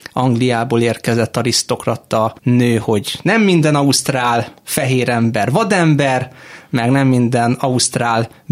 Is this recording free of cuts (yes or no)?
no